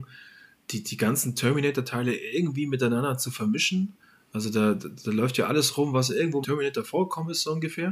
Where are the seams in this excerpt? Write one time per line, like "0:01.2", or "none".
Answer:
0:06.4

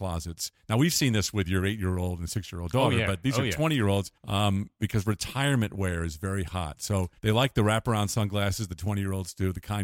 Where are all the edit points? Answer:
0:04.2
0:07.2

